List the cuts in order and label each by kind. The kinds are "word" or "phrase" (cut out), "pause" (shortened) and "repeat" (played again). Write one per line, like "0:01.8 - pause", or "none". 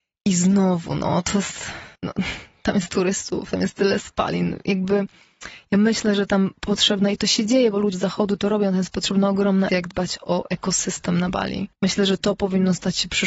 0:01.9 - pause
0:02.9 - word
0:07.9 - word
0:09.7 - word
0:11.7 - pause